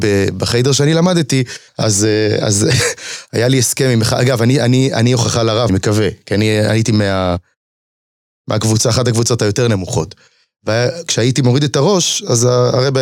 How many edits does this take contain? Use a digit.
2